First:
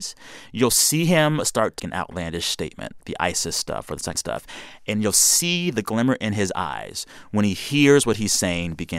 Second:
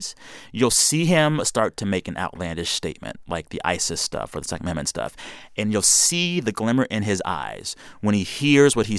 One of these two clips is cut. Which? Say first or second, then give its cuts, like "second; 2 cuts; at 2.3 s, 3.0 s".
first; 3 cuts; at 1.8 s, 3.0 s, 4.1 s